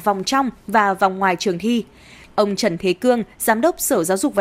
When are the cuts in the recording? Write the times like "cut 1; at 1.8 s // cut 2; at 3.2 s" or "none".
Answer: none

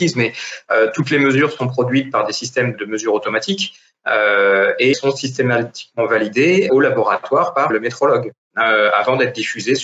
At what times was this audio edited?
cut 1; at 2.7 s // cut 2; at 4.9 s // cut 3; at 6.7 s // cut 4; at 7.7 s

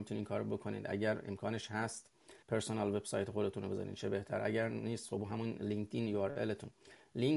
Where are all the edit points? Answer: cut 1; at 2.4 s

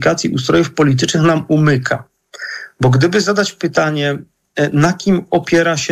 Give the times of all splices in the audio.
none

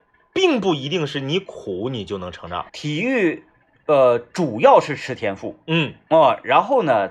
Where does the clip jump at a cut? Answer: cut 1; at 2.7 s

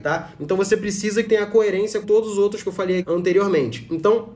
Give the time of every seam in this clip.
cut 1; at 1.2 s // cut 2; at 2.0 s // cut 3; at 2.6 s // cut 4; at 3.0 s

